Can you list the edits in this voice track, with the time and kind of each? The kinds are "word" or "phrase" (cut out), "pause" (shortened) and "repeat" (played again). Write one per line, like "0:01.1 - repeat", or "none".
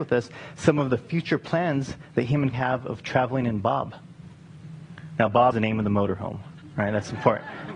0:02.5 - word
0:05.5 - word